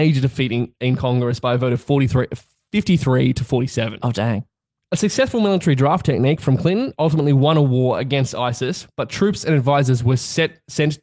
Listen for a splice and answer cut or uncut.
uncut